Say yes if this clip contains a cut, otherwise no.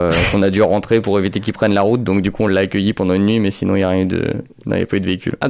no